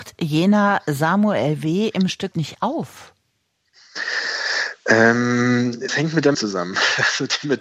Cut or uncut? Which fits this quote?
cut